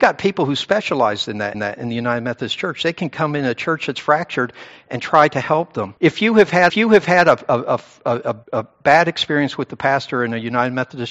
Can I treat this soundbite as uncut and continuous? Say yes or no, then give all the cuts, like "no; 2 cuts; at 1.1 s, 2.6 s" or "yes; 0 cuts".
no; 4 cuts; at 1.5 s, 6.0 s, 6.7 s, 8.4 s